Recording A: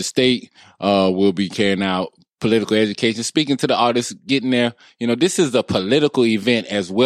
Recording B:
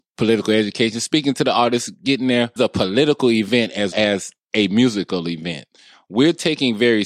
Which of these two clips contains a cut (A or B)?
B